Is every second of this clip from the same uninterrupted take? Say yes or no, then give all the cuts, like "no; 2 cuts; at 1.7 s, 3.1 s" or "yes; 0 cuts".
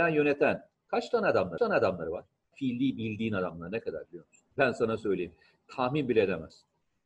no; 2 cuts; at 1.6 s, 4.5 s